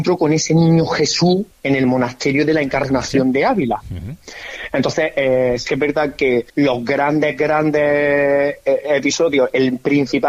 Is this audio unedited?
no; 1 cut; at 6.5 s

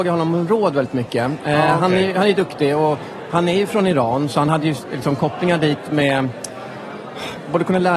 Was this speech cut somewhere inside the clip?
no; 0 cuts

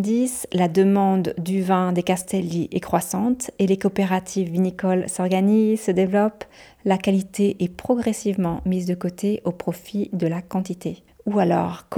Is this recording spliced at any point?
no; 0 cuts

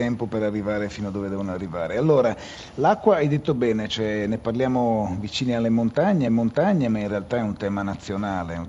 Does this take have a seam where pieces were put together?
yes; 1 cut; at 6.3 s

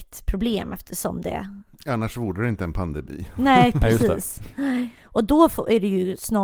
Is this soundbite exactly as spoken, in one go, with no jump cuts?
yes; 0 cuts

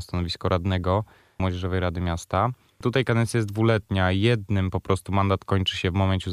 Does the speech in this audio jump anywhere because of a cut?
no; 0 cuts

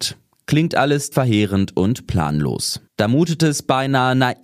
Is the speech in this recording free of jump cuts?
no; 2 cuts; at 1.1 s, 2.9 s

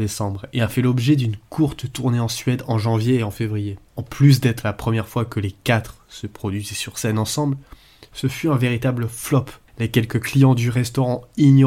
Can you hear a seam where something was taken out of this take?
no; 0 cuts

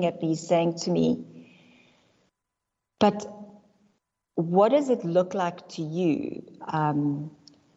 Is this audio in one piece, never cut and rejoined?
yes; 0 cuts

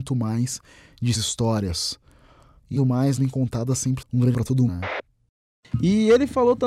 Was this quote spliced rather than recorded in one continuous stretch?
yes; 6 cuts; at 1.2 s, 2.8 s, 3.2 s, 4.0 s, 4.3 s, 4.7 s

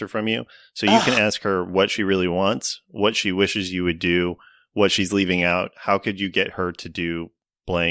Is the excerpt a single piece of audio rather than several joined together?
yes; 0 cuts

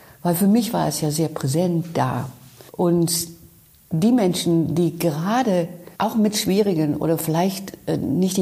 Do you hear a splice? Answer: yes; 2 cuts; at 2.7 s, 5.9 s

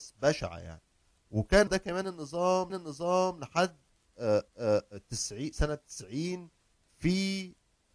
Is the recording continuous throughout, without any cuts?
no; 3 cuts; at 1.7 s, 2.7 s, 4.5 s

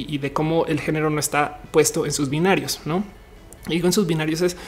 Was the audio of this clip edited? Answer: no; 0 cuts

